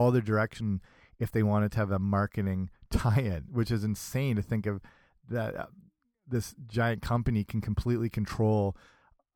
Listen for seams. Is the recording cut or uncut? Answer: uncut